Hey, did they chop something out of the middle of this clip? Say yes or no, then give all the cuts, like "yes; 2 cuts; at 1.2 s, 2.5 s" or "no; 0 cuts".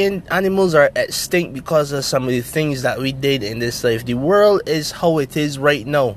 no; 0 cuts